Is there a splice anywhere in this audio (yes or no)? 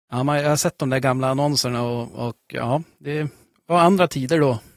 no